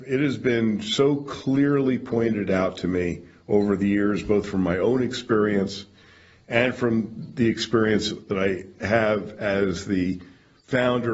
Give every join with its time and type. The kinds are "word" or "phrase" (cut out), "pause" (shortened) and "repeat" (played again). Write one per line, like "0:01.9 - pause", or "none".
none